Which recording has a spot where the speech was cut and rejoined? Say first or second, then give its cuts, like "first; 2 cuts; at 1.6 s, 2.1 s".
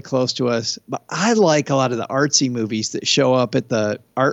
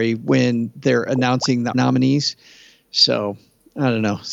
second; 1 cut; at 1.7 s